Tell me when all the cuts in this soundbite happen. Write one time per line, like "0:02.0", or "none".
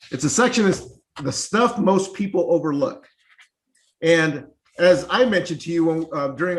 none